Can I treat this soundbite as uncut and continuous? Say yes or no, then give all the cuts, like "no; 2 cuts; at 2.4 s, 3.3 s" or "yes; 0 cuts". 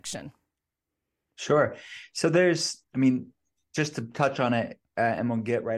yes; 0 cuts